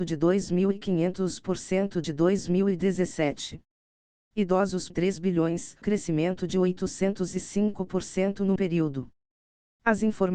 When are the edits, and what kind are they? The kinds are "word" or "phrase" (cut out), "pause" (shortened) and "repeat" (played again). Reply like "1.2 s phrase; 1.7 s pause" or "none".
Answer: 2.0 s word; 4.9 s word; 5.8 s word; 8.6 s word

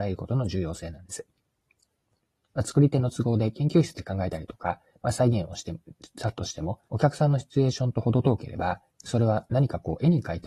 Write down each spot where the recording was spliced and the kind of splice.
6.9 s pause; 8.9 s pause

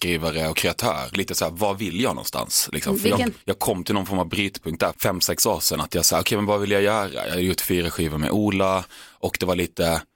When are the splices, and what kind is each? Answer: 1.1 s word; 3.4 s pause; 4.9 s word

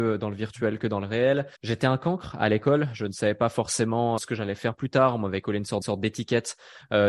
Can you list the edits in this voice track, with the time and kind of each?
1.6 s pause; 4.2 s word; 5.8 s repeat

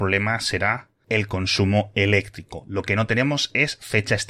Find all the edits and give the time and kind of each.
none

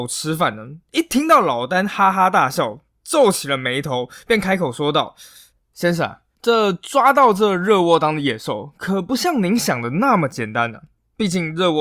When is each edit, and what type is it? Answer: 6.4 s pause

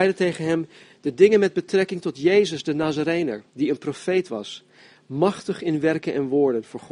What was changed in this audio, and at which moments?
3.5 s pause

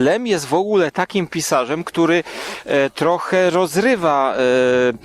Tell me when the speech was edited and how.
none

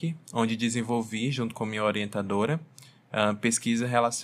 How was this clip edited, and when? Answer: none

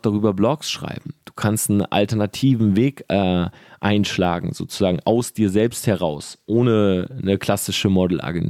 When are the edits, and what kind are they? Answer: none

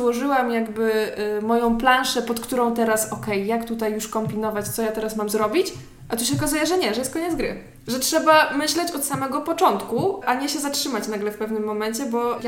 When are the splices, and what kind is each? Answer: none

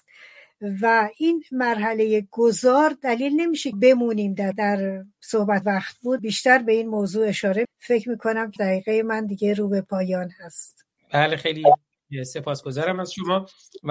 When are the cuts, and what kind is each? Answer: 3.7 s phrase; 4.5 s phrase; 5.6 s phrase; 6.2 s word; 7.6 s word; 8.6 s word

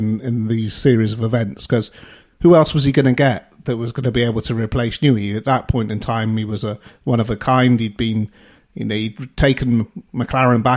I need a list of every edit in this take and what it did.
none

